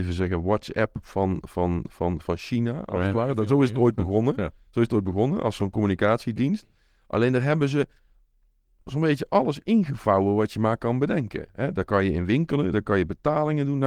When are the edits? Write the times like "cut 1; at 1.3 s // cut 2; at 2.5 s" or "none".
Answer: none